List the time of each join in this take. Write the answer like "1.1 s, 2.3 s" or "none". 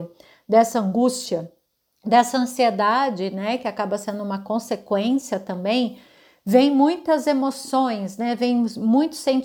none